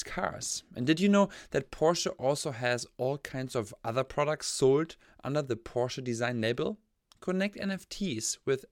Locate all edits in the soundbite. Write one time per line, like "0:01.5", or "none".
none